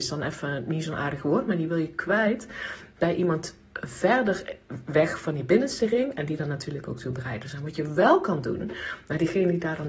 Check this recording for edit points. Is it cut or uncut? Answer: uncut